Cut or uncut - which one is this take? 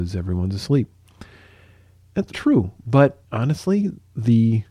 cut